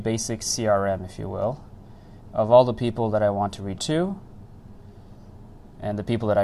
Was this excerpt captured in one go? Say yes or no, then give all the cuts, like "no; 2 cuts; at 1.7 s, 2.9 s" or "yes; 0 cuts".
no; 1 cut; at 3.8 s